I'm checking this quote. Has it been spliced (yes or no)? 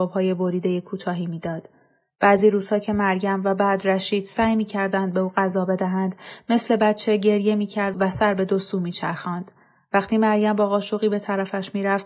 no